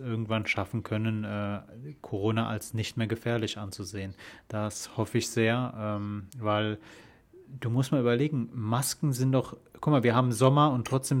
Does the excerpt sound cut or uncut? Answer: cut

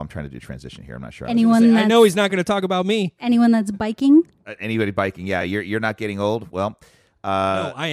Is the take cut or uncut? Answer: uncut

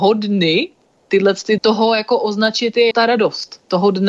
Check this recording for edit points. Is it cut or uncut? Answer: cut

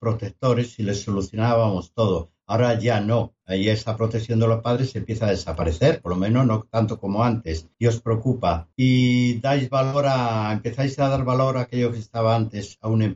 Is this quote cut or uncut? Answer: cut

